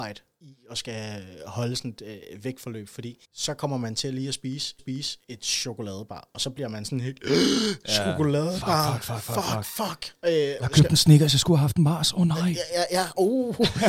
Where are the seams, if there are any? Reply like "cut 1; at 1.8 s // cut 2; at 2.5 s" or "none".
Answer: cut 1; at 3.2 s // cut 2; at 4.8 s // cut 3; at 10.6 s